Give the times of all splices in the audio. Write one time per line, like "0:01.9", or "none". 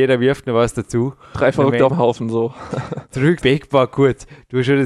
0:01.9
0:03.4